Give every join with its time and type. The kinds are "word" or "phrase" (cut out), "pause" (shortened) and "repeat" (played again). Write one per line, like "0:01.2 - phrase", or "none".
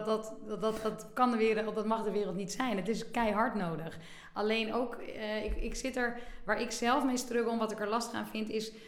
none